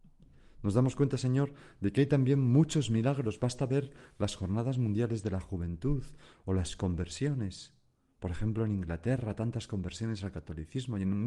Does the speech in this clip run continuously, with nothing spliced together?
yes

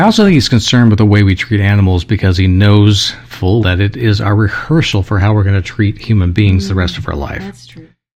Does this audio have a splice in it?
yes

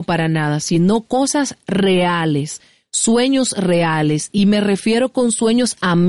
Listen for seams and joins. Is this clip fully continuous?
yes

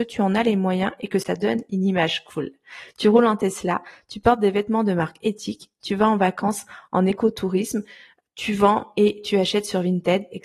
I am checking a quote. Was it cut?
no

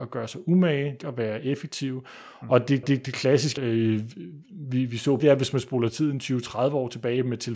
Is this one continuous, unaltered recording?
no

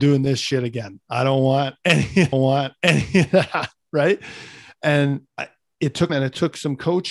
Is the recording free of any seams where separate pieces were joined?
no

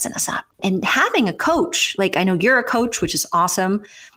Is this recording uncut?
yes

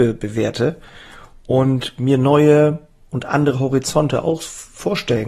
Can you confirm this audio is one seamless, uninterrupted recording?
yes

